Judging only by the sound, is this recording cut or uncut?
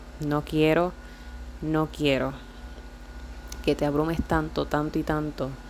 uncut